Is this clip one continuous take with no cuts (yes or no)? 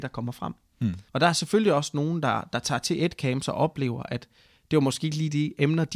no